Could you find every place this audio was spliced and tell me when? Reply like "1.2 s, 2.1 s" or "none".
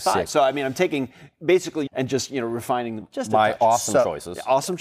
1.9 s